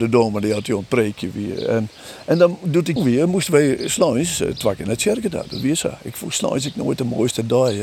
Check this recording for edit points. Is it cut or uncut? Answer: cut